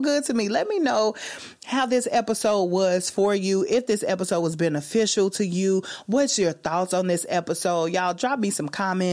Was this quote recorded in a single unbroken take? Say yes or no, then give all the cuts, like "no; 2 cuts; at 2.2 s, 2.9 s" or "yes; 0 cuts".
yes; 0 cuts